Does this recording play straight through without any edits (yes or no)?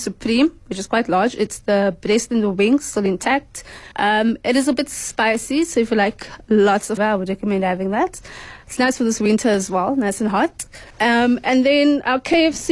no